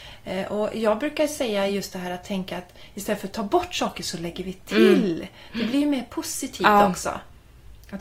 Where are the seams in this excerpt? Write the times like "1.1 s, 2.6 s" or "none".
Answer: none